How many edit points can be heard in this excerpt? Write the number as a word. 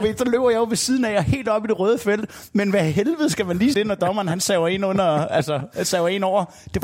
one